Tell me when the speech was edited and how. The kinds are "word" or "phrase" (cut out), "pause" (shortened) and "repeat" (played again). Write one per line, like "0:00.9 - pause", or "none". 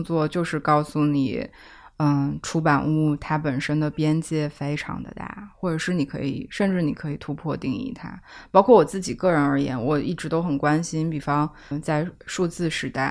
0:11.7 - word

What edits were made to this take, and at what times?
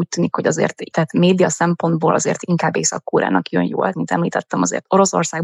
0:00.9 - word
0:03.9 - word

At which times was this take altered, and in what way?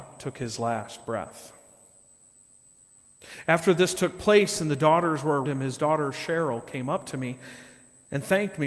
0:05.4 - word

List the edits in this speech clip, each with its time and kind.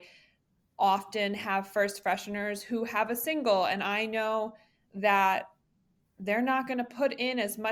none

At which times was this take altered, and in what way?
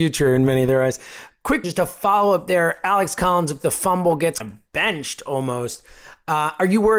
0:01.6 - word
0:03.6 - word
0:04.4 - word

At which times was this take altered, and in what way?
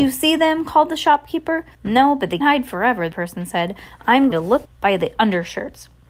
0:01.7 - pause
0:02.4 - word
0:03.1 - word
0:04.3 - word
0:04.6 - word

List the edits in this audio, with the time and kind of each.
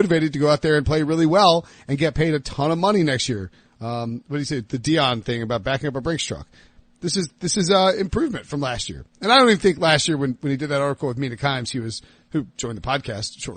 none

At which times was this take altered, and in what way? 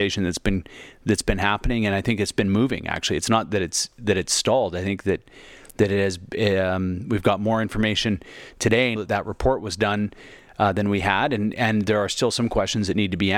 0:09.0 - word

